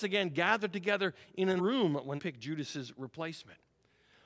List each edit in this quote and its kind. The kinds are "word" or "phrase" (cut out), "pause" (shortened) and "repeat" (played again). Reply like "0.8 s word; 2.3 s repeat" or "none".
1.6 s word; 2.2 s word

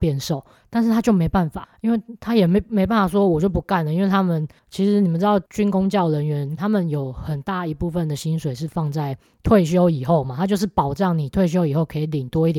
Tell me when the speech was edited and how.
5.5 s pause; 6.6 s phrase

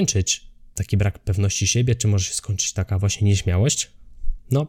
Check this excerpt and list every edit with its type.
none

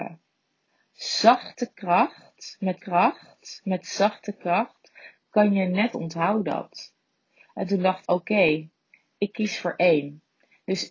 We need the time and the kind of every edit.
2.8 s repeat; 5.9 s phrase; 8.0 s word

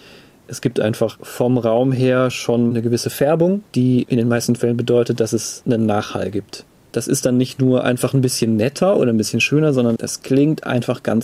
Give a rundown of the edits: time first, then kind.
none

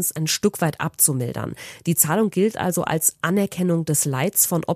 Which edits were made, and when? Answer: none

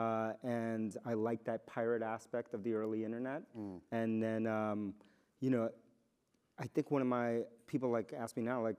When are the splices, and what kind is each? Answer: none

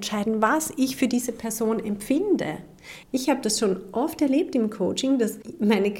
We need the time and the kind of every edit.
3.0 s pause

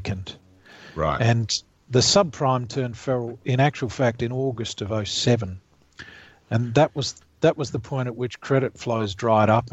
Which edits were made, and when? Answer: none

